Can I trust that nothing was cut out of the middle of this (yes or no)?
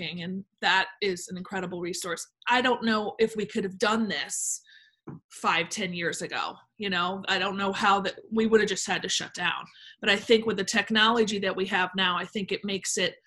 no